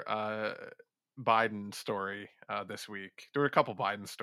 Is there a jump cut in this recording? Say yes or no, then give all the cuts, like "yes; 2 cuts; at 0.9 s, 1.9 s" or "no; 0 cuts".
no; 0 cuts